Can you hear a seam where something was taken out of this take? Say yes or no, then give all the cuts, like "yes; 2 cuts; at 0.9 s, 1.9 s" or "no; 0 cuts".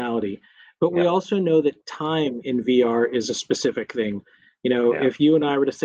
no; 0 cuts